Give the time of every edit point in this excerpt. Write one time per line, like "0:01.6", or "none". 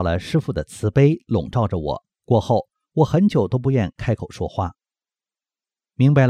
0:02.1